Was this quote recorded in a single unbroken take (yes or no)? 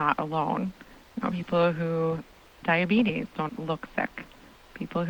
no